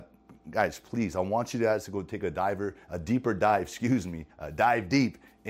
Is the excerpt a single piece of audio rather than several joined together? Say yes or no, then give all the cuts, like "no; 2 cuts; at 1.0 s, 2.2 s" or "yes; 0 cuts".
no; 1 cut; at 4.3 s